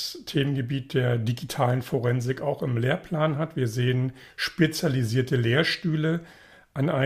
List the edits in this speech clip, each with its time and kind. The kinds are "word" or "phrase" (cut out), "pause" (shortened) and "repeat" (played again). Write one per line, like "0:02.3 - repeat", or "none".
none